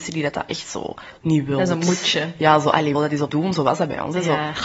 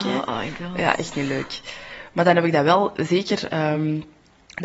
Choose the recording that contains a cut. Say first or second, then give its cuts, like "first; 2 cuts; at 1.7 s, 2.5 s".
first; 3 cuts; at 1.2 s, 2.9 s, 3.3 s